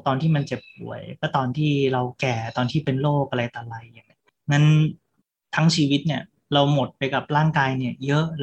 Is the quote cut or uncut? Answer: uncut